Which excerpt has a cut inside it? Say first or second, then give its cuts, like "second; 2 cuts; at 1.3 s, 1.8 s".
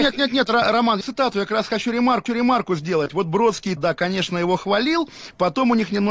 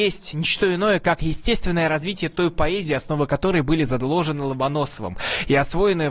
first; 3 cuts; at 1.0 s, 2.3 s, 3.8 s